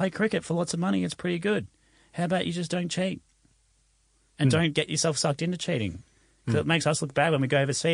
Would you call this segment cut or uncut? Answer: uncut